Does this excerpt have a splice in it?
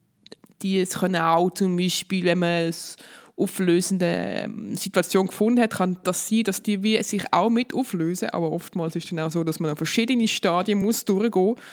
no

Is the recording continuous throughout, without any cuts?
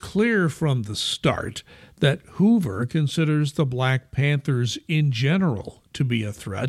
yes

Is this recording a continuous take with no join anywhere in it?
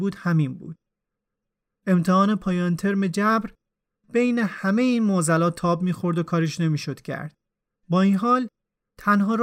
yes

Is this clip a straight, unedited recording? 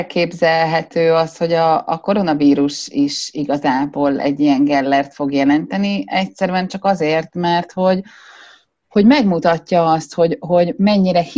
yes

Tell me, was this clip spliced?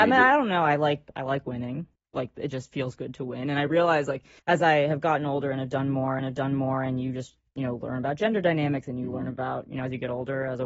yes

